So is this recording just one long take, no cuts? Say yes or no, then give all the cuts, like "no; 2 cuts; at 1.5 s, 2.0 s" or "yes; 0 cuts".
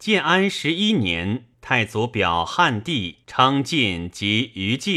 no; 2 cuts; at 1.5 s, 3.2 s